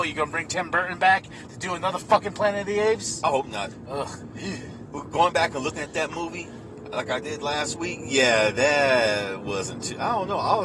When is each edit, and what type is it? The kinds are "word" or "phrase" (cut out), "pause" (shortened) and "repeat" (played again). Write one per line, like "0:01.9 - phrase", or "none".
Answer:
none